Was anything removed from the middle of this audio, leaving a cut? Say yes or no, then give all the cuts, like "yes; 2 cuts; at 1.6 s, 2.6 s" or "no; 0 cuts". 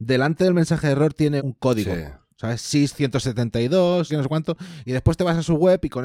yes; 2 cuts; at 1.4 s, 4.1 s